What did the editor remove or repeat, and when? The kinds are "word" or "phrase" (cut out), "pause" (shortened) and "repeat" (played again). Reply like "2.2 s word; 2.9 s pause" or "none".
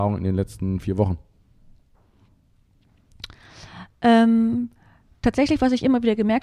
none